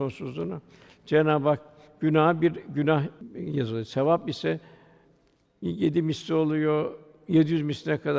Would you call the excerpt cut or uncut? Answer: uncut